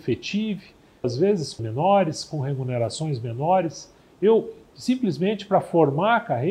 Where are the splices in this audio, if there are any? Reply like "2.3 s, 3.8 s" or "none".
1.0 s, 1.6 s, 4.0 s